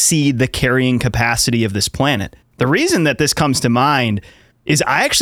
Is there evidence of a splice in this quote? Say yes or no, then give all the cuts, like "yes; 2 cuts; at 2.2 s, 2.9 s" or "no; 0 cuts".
no; 0 cuts